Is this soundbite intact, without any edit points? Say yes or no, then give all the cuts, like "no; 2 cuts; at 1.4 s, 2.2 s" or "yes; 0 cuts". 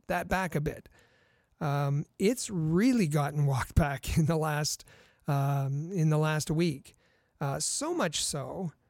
yes; 0 cuts